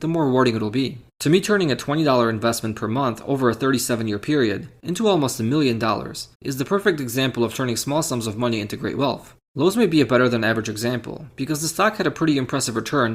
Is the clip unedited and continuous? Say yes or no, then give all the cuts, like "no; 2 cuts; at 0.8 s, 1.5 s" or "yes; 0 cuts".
no; 2 cuts; at 1.1 s, 6.3 s